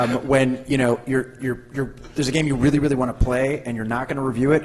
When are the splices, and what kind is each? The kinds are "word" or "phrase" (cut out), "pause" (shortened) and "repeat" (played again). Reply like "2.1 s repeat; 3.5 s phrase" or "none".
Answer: none